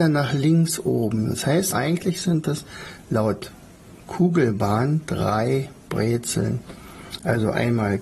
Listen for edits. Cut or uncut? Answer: cut